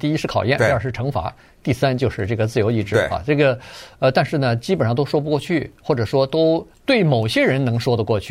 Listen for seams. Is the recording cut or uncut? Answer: cut